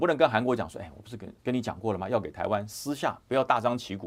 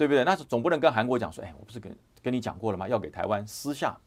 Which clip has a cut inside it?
first; 1 cut; at 1.4 s

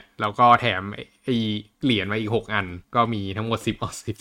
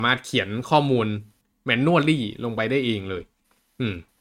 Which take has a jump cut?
first; 1 cut; at 2.8 s

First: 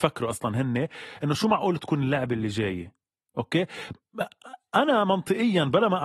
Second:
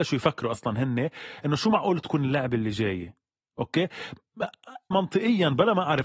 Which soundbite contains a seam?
second; 1 cut; at 4.9 s

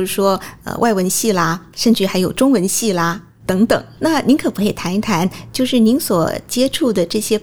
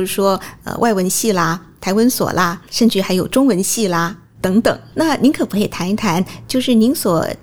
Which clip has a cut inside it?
first; 1 cut; at 1.7 s

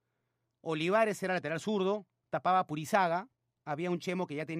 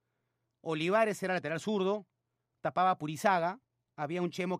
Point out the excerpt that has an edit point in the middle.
first; 1 cut; at 2.2 s

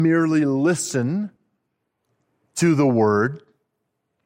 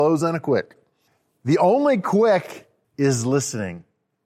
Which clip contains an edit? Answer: second; 2 cuts; at 1.1 s, 2.8 s

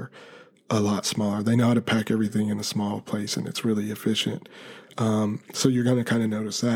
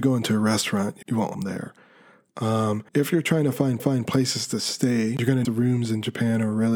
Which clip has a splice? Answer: second; 5 cuts; at 1.0 s, 1.3 s, 2.9 s, 3.8 s, 5.4 s

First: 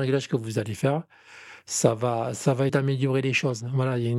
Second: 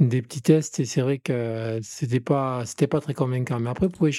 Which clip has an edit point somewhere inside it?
first; 1 cut; at 2.7 s

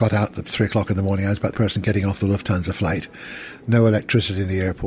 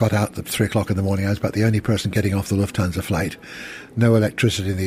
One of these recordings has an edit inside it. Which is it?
first; 1 cut; at 1.5 s

